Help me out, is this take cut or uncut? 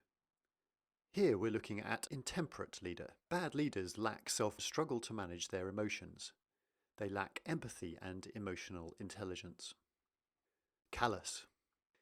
cut